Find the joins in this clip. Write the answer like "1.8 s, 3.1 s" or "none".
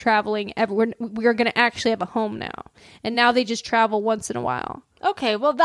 none